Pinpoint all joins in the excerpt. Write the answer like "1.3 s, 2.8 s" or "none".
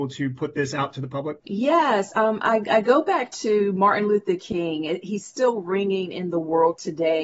1.4 s